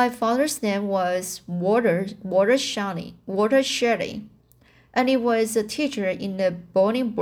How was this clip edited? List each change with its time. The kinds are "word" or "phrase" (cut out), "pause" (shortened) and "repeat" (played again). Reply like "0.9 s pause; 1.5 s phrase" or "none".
none